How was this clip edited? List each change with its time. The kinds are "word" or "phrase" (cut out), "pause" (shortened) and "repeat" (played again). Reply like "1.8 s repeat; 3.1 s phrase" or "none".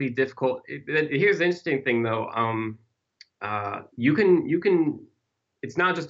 3.9 s pause

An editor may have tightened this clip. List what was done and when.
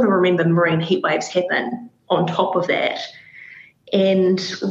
none

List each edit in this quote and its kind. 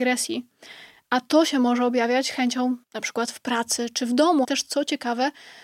2.8 s word; 4.4 s word

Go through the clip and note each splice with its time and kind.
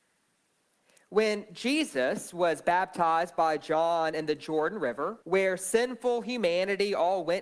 5.2 s pause

